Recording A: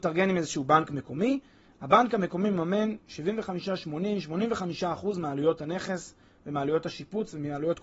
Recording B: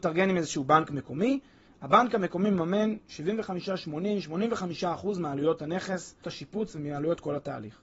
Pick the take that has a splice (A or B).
B